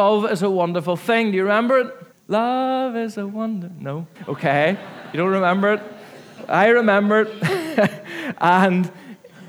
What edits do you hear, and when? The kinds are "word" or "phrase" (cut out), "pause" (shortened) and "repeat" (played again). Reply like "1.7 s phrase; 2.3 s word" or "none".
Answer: 2.1 s pause; 4.1 s pause